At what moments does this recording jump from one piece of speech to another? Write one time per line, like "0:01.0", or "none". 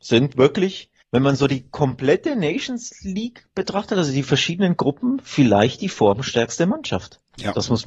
0:01.0